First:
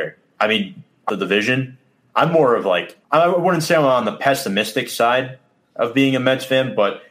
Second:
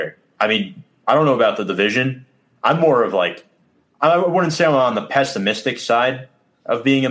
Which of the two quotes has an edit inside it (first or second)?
first